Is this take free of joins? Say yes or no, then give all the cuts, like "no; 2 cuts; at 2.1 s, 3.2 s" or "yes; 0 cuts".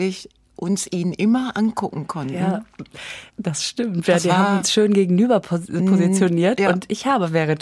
no; 1 cut; at 3.3 s